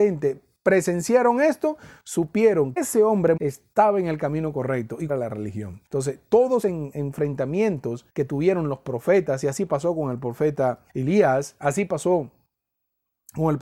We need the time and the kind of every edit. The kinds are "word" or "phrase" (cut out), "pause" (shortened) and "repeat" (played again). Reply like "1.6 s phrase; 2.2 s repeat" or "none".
2.8 s word; 3.4 s word; 5.1 s phrase; 5.9 s pause; 6.6 s word; 8.1 s pause; 10.9 s pause